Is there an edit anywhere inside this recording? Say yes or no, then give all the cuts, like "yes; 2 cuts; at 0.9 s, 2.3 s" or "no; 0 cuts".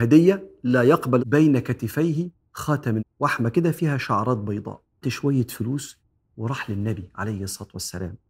yes; 3 cuts; at 1.2 s, 3.0 s, 5.0 s